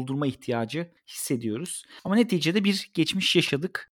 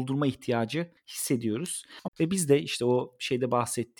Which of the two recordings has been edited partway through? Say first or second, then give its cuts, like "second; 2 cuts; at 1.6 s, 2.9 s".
second; 1 cut; at 2.1 s